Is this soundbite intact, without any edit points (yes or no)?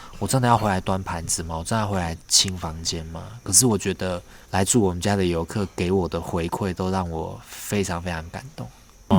no